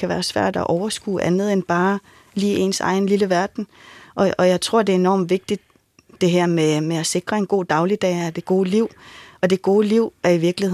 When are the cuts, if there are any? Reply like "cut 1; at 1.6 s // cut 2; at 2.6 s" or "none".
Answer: none